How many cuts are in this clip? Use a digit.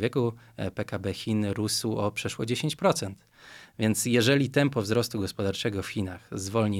0